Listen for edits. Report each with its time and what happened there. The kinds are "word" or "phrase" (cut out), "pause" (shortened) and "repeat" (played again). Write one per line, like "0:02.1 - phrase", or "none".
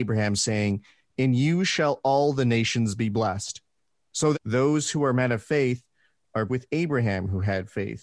0:04.3 - word
0:06.5 - word